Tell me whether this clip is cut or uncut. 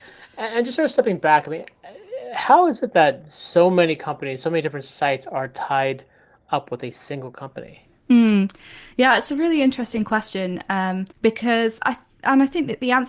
cut